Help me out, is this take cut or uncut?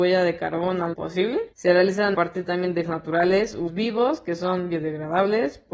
cut